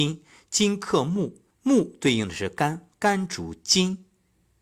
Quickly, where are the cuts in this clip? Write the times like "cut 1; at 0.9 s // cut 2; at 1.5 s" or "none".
cut 1; at 1.5 s

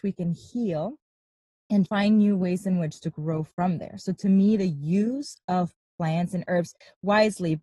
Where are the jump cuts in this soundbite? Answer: cut 1; at 1.9 s

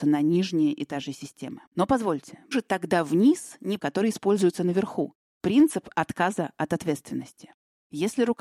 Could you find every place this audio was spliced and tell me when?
cut 1; at 1.7 s // cut 2; at 2.5 s // cut 3; at 3.8 s

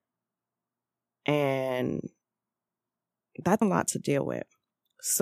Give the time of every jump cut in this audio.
cut 1; at 3.6 s

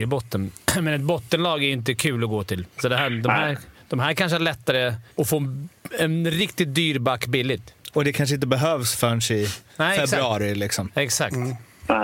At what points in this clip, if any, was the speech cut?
cut 1; at 2.7 s // cut 2; at 5.1 s

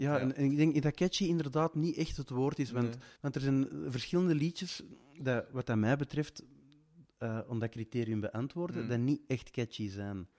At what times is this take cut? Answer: cut 1; at 3.2 s

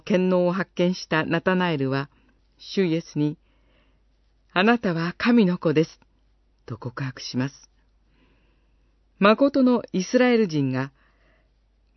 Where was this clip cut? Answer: none

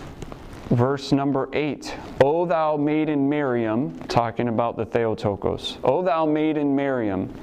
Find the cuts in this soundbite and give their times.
none

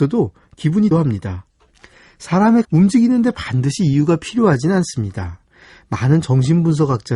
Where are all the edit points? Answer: cut 1; at 0.9 s // cut 2; at 2.6 s

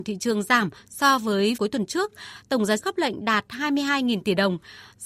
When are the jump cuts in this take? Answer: cut 1; at 1.6 s // cut 2; at 2.8 s

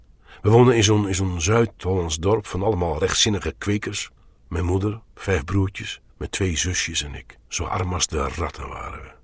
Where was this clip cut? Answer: cut 1; at 4.2 s // cut 2; at 5.1 s // cut 3; at 6.1 s // cut 4; at 7.4 s

